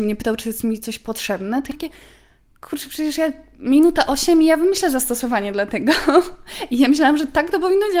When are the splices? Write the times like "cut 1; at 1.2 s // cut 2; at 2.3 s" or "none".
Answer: cut 1; at 1.7 s